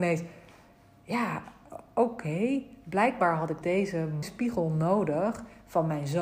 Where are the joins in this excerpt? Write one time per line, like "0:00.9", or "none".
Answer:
0:03.6
0:04.2